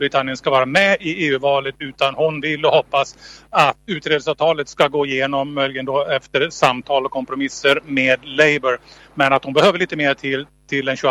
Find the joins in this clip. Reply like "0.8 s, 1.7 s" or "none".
3.9 s